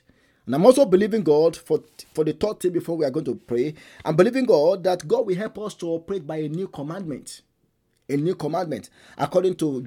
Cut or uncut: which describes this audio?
uncut